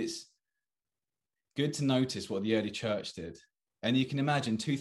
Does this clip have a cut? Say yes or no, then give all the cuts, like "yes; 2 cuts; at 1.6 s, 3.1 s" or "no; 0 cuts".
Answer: no; 0 cuts